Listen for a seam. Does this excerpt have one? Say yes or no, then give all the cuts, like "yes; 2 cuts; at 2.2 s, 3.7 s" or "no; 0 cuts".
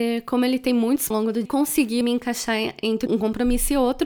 yes; 4 cuts; at 1.1 s, 1.5 s, 2.0 s, 3.1 s